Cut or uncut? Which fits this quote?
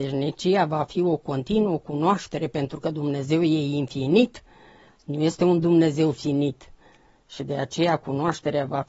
uncut